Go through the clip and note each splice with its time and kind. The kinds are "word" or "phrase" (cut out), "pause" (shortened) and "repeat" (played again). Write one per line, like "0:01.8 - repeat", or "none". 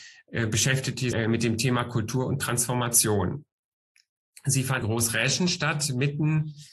0:01.1 - word
0:04.8 - word